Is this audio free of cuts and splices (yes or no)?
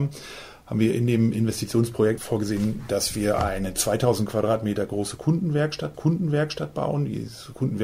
no